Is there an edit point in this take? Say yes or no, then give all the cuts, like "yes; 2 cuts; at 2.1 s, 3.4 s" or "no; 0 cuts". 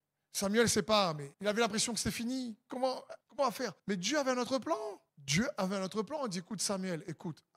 yes; 4 cuts; at 1.3 s, 3.2 s, 3.8 s, 5.1 s